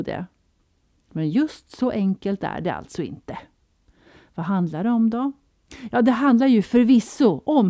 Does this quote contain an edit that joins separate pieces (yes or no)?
no